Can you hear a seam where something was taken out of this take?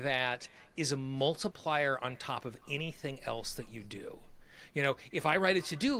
no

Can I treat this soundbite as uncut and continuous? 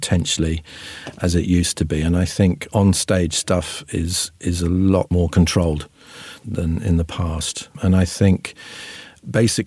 no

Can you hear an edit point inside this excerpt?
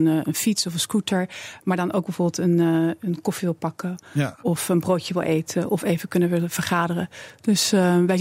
no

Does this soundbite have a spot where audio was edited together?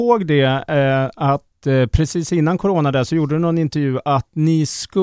no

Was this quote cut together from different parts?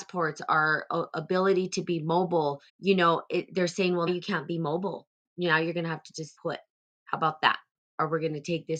yes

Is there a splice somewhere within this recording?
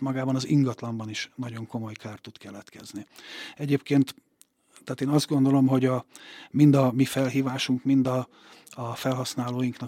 no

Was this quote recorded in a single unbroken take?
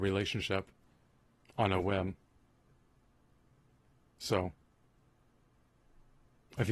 yes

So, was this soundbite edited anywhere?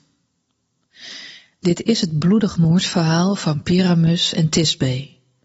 no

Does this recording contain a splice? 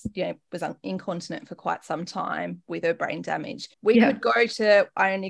yes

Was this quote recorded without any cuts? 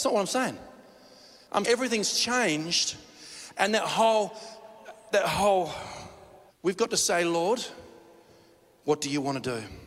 no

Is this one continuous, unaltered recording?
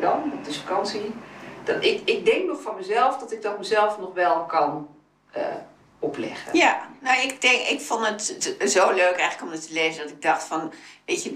yes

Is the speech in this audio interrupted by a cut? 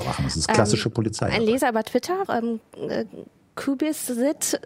yes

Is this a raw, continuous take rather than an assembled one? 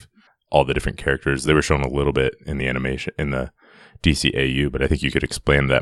yes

